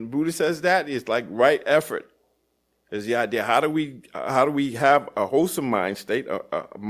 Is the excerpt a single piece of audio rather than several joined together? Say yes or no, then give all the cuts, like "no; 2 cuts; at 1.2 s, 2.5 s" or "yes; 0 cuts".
yes; 0 cuts